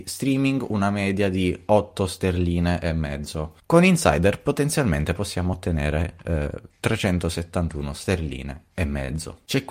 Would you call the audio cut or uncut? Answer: uncut